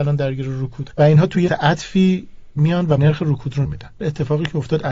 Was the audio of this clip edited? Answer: yes; 4 cuts; at 0.9 s, 1.5 s, 3.0 s, 3.6 s

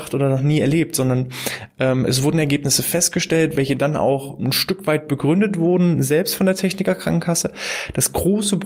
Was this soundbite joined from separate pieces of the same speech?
no; 0 cuts

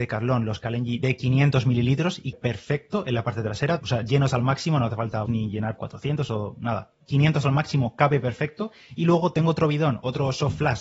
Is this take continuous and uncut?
no; 4 cuts; at 2.3 s, 3.8 s, 5.3 s, 5.8 s

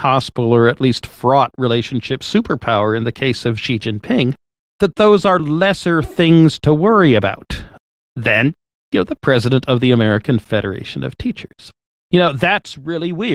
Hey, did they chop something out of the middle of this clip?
no; 0 cuts

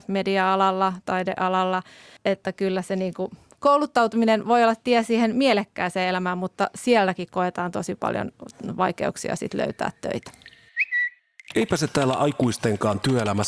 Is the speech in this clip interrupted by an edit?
no; 0 cuts

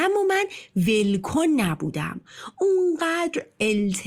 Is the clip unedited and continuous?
yes; 0 cuts

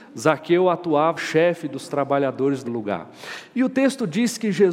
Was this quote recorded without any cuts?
no; 2 cuts; at 1.2 s, 2.6 s

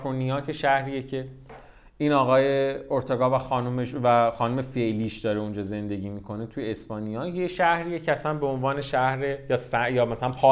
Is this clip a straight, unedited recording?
yes; 0 cuts

